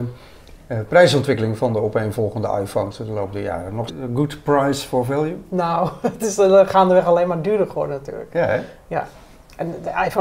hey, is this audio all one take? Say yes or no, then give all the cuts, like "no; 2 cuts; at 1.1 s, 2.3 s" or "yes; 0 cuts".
no; 1 cut; at 3.9 s